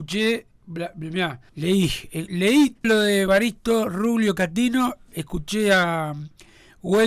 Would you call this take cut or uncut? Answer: cut